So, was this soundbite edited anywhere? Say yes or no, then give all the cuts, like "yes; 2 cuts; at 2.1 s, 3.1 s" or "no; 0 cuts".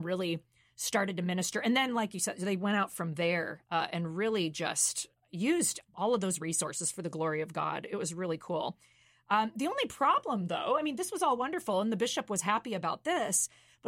no; 0 cuts